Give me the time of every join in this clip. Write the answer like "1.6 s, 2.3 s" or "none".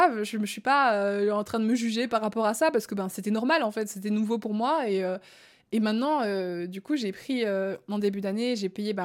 none